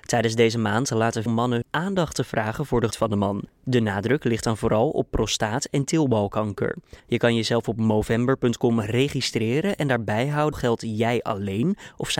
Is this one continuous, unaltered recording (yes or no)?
no